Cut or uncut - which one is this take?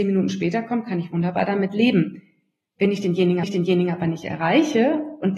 cut